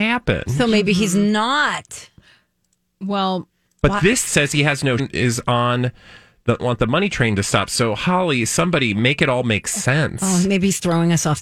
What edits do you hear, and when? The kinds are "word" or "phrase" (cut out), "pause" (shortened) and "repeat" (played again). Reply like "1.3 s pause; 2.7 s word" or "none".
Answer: 4.3 s word; 5.0 s word; 6.6 s word